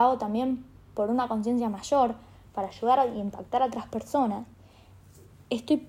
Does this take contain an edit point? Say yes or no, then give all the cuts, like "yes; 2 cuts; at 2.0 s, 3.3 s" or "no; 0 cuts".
no; 0 cuts